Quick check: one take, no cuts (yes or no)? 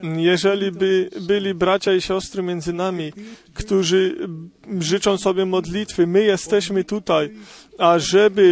yes